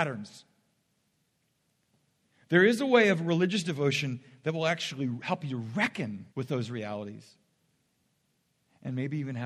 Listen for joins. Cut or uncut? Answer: cut